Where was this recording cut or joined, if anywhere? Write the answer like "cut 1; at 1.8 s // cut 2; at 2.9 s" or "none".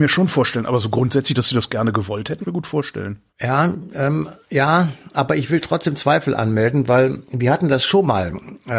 cut 1; at 2.4 s // cut 2; at 3.3 s